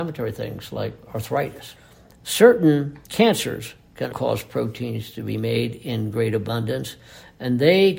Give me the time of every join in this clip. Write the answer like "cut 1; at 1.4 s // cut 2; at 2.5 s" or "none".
cut 1; at 3.0 s // cut 2; at 4.1 s